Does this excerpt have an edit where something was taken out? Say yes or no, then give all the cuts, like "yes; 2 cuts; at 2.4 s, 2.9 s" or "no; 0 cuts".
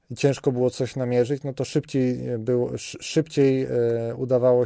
no; 0 cuts